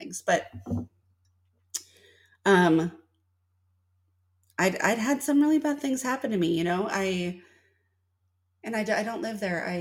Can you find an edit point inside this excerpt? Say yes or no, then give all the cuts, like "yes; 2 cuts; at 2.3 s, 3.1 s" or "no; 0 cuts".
no; 0 cuts